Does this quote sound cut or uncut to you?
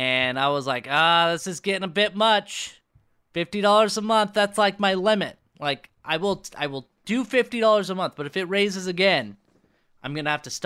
uncut